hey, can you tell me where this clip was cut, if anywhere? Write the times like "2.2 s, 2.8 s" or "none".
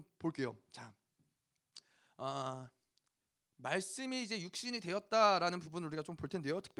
none